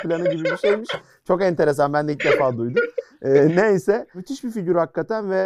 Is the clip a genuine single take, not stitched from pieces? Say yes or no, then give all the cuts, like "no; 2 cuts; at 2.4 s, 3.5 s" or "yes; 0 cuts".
yes; 0 cuts